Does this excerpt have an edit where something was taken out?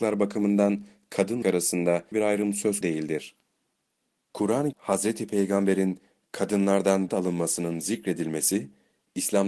yes; 5 cuts; at 1.4 s, 2.1 s, 2.8 s, 4.7 s, 7.1 s

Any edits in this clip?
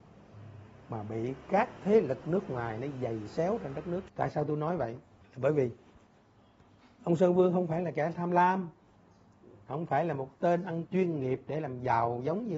yes; 3 cuts; at 4.1 s, 8.1 s, 10.9 s

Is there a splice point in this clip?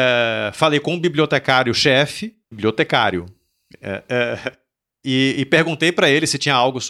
yes; 1 cut; at 2.4 s

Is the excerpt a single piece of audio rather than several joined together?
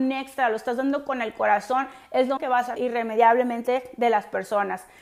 no; 2 cuts; at 2.4 s, 2.8 s

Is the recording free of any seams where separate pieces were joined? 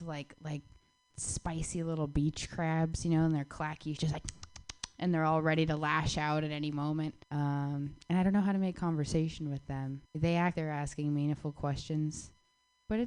no; 5 cuts; at 1.1 s, 4.0 s, 7.2 s, 10.1 s, 10.5 s

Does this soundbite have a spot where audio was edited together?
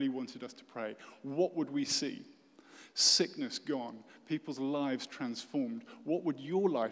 no; 0 cuts

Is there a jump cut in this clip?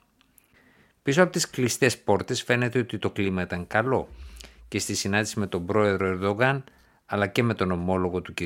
no; 0 cuts

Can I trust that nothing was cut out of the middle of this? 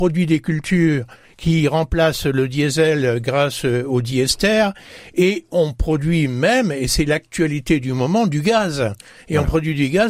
yes; 0 cuts

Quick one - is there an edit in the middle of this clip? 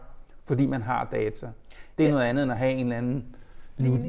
no; 0 cuts

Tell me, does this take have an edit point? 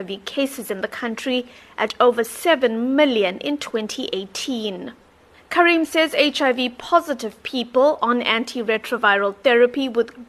no; 0 cuts

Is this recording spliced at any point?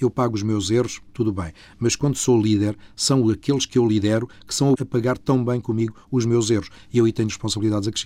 yes; 1 cut; at 4.7 s

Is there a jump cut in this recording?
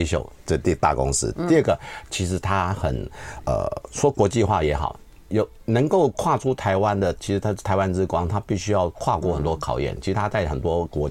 no; 0 cuts

